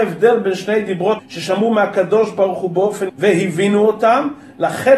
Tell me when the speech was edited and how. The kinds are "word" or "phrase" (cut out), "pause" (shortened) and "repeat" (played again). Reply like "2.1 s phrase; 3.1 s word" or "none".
1.2 s word; 3.1 s word